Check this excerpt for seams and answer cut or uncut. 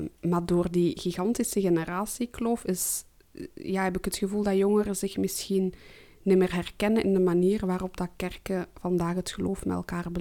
uncut